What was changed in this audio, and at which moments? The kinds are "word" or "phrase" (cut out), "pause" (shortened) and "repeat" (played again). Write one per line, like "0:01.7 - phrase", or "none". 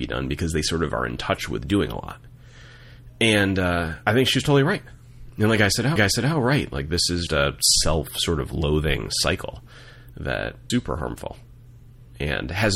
0:06.0 - repeat
0:07.3 - word
0:10.7 - phrase